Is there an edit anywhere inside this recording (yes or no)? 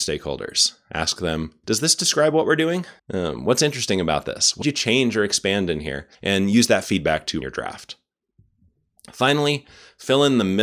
yes